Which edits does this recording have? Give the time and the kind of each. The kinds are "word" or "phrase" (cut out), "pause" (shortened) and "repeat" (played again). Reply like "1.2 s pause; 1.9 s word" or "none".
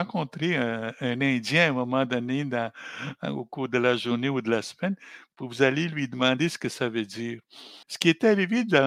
7.8 s pause